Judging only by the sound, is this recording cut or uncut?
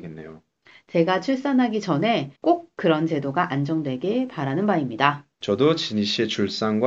cut